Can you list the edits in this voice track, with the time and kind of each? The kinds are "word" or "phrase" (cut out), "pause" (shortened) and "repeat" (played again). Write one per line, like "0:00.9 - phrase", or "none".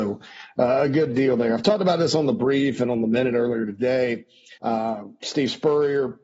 0:04.6 - pause